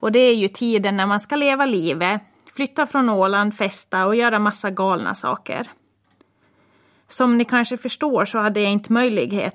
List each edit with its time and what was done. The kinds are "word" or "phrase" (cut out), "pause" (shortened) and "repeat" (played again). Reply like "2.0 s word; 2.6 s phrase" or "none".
none